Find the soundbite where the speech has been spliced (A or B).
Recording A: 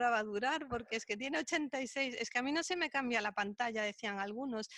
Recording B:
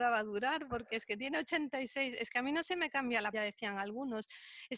B